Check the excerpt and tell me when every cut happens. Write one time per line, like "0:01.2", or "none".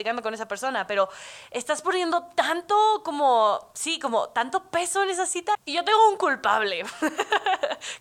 none